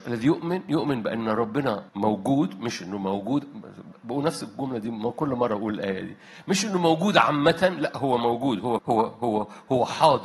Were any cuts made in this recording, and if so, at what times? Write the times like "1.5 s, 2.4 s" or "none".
1.9 s, 8.8 s